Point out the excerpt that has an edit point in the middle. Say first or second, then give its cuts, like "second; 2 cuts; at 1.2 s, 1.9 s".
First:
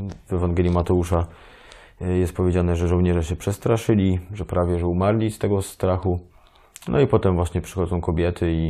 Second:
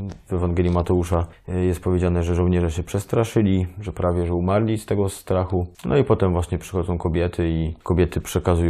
second; 3 cuts; at 1.3 s, 5.7 s, 7.8 s